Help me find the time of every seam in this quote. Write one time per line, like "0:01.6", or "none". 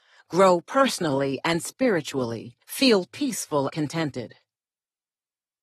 0:02.6
0:03.7